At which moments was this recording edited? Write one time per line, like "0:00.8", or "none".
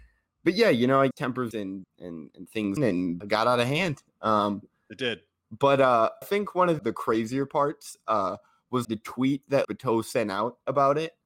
0:01.1
0:01.5
0:01.8
0:02.8
0:03.2
0:06.2
0:06.8
0:08.8
0:09.6